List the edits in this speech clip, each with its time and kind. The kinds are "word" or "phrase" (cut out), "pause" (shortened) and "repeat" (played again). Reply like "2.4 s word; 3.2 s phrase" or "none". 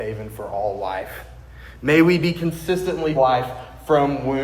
3.1 s word